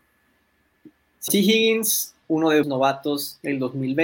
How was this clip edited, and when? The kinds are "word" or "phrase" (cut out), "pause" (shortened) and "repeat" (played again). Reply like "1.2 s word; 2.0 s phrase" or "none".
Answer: 1.3 s word; 2.2 s word; 2.6 s word